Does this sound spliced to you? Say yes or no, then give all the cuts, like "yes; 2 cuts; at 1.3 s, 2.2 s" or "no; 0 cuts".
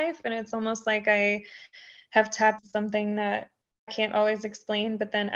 yes; 2 cuts; at 2.6 s, 3.9 s